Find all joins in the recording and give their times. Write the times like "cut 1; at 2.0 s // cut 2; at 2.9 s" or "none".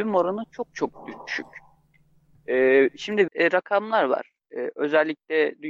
cut 1; at 3.3 s